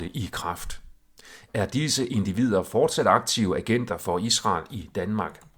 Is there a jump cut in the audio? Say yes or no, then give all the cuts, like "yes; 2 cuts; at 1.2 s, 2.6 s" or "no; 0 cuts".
no; 0 cuts